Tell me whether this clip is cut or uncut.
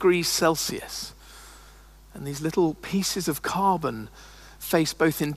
uncut